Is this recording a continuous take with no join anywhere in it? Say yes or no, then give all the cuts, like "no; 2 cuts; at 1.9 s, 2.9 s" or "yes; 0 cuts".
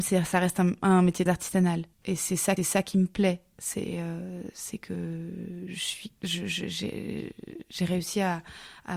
no; 4 cuts; at 1.3 s, 1.9 s, 2.6 s, 6.2 s